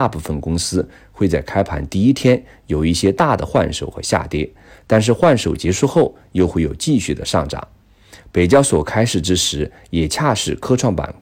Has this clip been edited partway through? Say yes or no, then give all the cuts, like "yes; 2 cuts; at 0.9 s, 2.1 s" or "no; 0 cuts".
no; 0 cuts